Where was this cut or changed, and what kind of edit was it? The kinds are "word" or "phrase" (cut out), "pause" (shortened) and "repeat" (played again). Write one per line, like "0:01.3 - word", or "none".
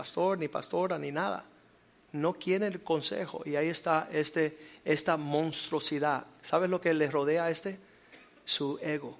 none